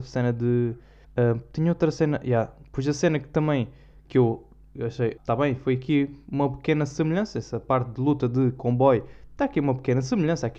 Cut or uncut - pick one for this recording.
cut